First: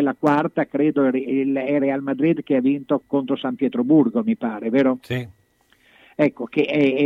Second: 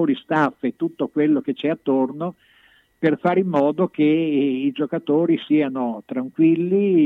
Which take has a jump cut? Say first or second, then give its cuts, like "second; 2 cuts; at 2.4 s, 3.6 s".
first; 2 cuts; at 1.8 s, 3.0 s